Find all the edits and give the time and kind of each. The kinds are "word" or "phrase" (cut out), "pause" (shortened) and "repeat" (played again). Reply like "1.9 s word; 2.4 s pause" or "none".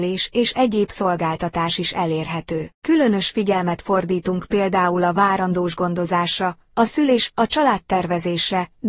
2.8 s pause; 7.3 s word

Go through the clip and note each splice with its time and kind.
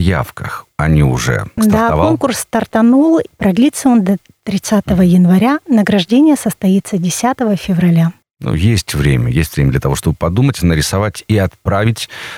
1.6 s phrase

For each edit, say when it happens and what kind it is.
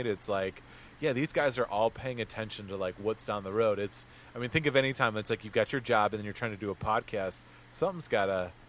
none

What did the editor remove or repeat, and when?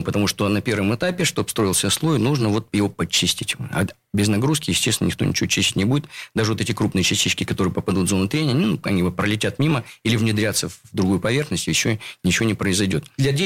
none

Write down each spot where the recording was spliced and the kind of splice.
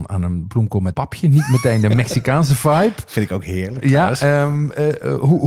0.9 s word

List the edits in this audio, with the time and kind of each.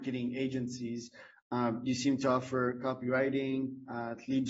none

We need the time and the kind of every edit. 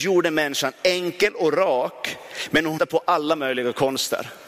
2.8 s word

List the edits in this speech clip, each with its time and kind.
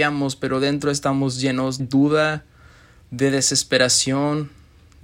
1.8 s word

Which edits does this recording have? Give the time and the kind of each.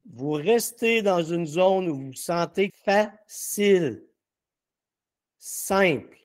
2.7 s phrase

